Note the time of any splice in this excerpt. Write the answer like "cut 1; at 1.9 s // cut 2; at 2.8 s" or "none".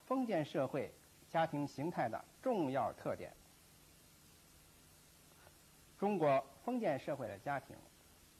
none